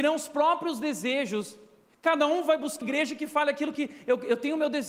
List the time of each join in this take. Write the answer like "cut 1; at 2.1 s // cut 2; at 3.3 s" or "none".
cut 1; at 1.9 s // cut 2; at 2.8 s